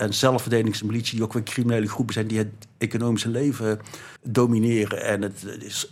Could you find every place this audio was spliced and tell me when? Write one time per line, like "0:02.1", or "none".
0:04.2